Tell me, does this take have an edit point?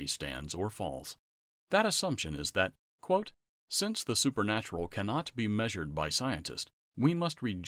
no; 0 cuts

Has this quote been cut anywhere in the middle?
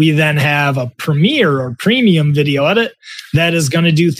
no; 0 cuts

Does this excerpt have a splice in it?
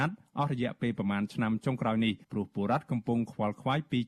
yes; 1 cut; at 2.2 s

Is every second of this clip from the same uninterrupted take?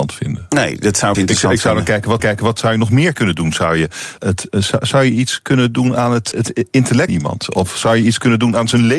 no; 5 cuts; at 1.1 s, 2.2 s, 4.2 s, 6.3 s, 7.1 s

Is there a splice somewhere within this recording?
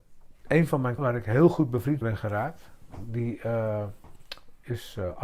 yes; 2 cuts; at 1.0 s, 2.0 s

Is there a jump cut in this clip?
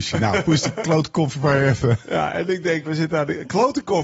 yes; 1 cut; at 2.9 s

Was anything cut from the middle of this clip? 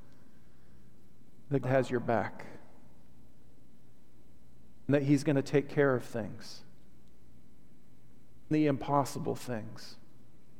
yes; 3 cuts; at 1.6 s, 4.9 s, 8.5 s

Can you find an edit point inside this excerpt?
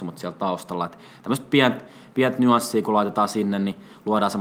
no; 0 cuts

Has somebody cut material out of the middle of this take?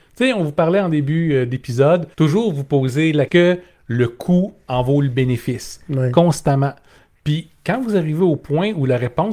yes; 2 cuts; at 2.1 s, 3.3 s

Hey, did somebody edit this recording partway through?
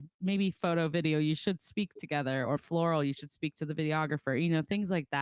yes; 1 cut; at 2.6 s

